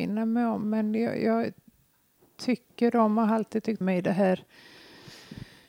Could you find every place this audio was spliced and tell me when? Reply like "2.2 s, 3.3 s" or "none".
3.8 s

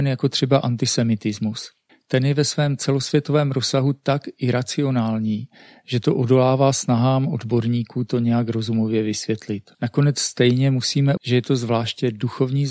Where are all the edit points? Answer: 1.9 s, 9.7 s, 11.2 s

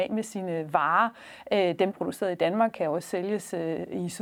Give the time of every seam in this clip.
1.9 s

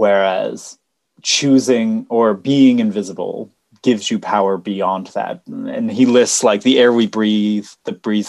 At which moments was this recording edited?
3.7 s

